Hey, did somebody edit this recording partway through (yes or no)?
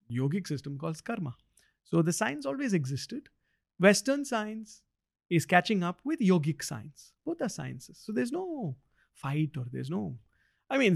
no